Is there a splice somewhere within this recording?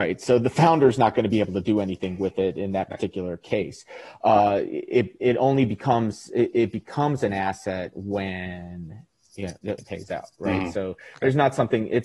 yes; 1 cut; at 9.8 s

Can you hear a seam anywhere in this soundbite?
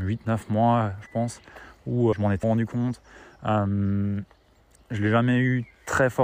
yes; 2 cuts; at 2.1 s, 2.4 s

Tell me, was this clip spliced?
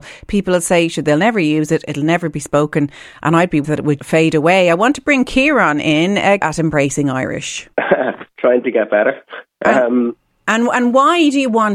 yes; 5 cuts; at 3.6 s, 4.0 s, 6.4 s, 7.7 s, 9.5 s

